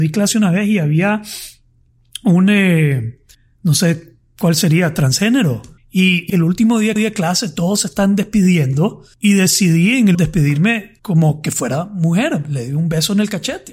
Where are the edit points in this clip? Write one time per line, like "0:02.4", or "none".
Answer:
0:03.3
0:05.8
0:06.3
0:07.0
0:09.1
0:10.1
0:11.0